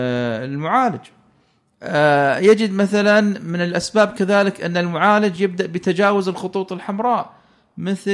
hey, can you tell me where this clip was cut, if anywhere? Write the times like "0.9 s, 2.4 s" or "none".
none